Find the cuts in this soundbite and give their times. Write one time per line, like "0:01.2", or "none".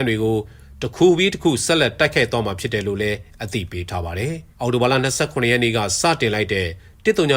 0:04.5

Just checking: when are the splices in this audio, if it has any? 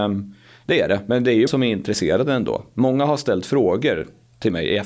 0:01.5

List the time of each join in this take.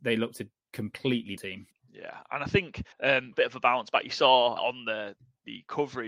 0:01.4
0:01.7
0:02.9
0:03.3
0:04.6

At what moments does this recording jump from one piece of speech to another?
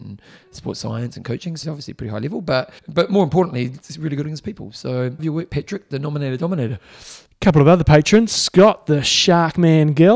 0:01.6
0:02.8
0:04.2
0:05.2

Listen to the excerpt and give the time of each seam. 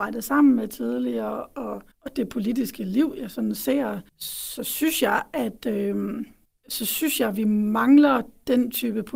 0:01.9
0:04.1
0:06.5

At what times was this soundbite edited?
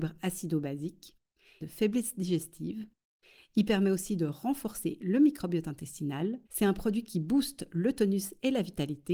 0:01.6
0:06.5

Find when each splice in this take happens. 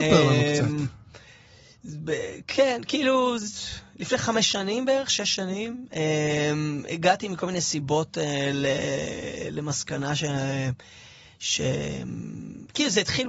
none

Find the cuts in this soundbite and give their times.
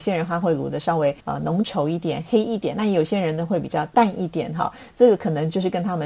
0:01.2

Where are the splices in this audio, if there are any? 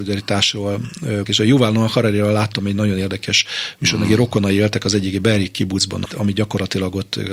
0:01.2
0:06.1

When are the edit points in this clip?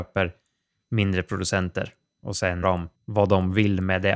0:02.6
0:03.0

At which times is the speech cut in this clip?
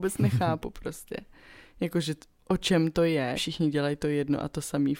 0:03.3

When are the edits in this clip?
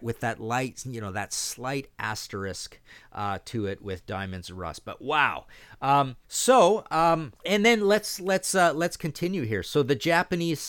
0:06.2
0:07.4

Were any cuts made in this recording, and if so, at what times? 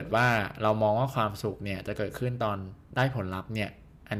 0:02.8

